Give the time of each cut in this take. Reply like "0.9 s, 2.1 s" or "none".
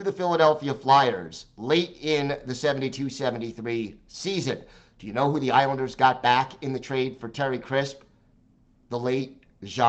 none